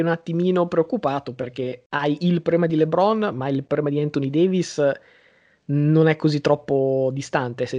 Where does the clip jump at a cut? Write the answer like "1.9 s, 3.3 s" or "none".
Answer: none